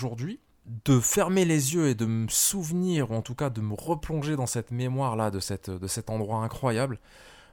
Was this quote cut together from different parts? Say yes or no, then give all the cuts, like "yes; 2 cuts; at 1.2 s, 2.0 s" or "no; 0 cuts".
no; 0 cuts